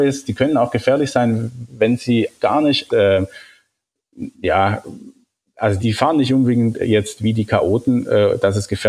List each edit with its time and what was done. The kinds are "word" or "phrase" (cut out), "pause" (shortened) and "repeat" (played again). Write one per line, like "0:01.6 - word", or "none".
0:01.7 - word
0:02.4 - word
0:02.9 - phrase
0:04.3 - pause
0:05.8 - word
0:06.7 - word